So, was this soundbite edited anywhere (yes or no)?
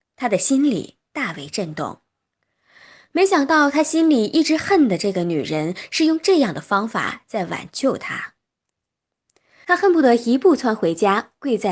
no